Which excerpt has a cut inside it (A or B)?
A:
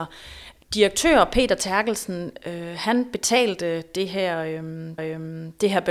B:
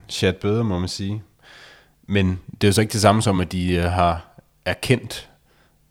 A